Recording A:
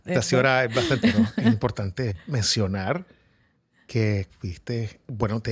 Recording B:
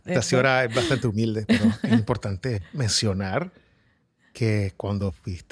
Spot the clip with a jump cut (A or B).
A